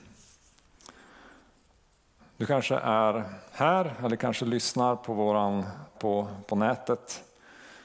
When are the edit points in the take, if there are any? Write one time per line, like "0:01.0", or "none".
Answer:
0:05.9